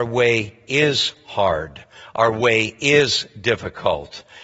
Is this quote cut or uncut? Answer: uncut